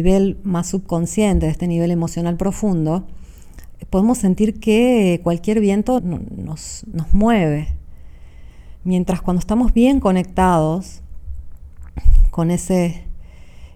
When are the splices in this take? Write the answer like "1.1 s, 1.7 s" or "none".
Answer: 6.0 s